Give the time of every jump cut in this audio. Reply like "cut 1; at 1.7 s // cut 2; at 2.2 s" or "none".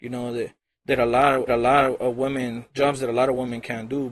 cut 1; at 1.5 s